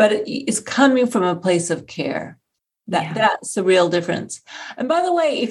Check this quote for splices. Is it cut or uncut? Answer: uncut